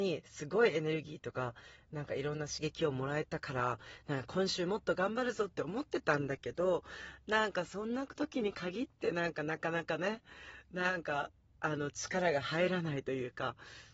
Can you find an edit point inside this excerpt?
yes; 1 cut; at 11.4 s

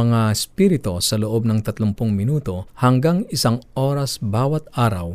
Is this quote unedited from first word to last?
no; 1 cut; at 2.7 s

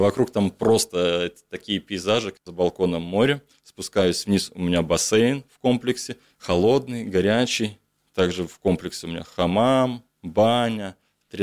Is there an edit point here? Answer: no; 0 cuts

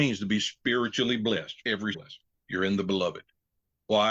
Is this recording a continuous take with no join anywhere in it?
no; 3 cuts; at 1.6 s, 1.9 s, 2.3 s

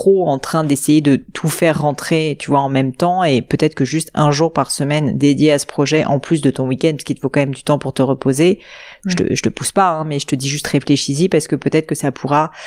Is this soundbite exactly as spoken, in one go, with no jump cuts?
yes; 0 cuts

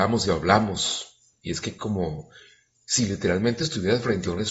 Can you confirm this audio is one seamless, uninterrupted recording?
yes; 0 cuts

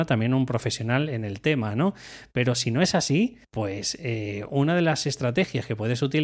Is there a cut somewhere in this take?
yes; 1 cut; at 3.4 s

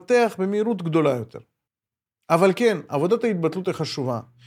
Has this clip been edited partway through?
no; 0 cuts

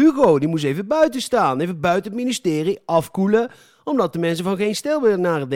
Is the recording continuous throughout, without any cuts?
yes; 0 cuts

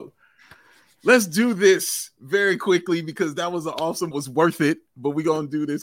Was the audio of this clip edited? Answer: yes; 1 cut; at 4.1 s

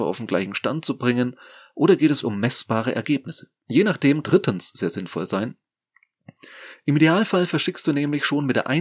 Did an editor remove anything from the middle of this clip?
yes; 3 cuts; at 2.2 s, 3.6 s, 4.2 s

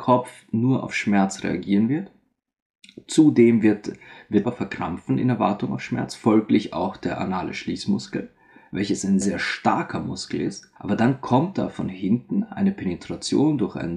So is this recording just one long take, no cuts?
no; 3 cuts; at 4.4 s, 9.2 s, 10.8 s

